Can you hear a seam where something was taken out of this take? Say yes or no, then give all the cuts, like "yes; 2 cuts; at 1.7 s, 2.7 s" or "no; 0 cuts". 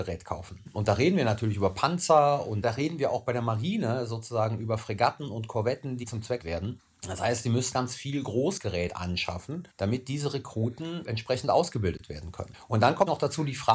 yes; 3 cuts; at 6.4 s, 7.7 s, 9.7 s